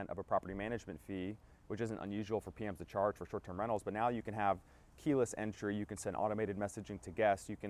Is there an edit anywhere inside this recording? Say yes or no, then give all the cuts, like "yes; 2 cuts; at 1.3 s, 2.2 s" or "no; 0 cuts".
no; 0 cuts